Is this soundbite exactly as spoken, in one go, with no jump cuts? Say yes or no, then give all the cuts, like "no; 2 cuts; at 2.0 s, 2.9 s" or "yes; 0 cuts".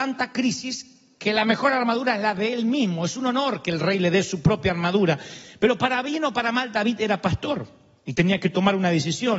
yes; 0 cuts